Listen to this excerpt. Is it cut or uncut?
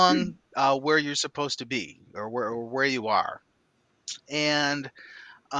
uncut